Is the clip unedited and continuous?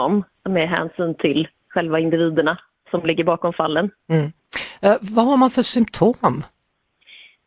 yes; 0 cuts

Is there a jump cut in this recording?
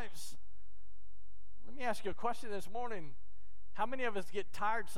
no; 0 cuts

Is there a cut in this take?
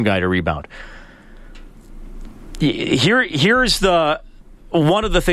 no; 0 cuts

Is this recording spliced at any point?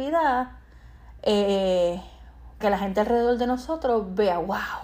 yes; 1 cut; at 2.6 s

